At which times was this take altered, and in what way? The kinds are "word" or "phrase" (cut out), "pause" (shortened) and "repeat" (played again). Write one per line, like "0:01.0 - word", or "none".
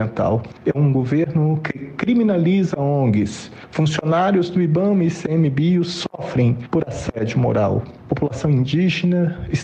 none